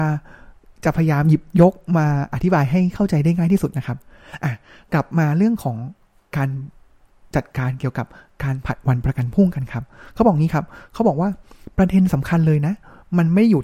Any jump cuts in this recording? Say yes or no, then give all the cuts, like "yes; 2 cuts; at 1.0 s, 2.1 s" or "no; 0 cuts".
no; 0 cuts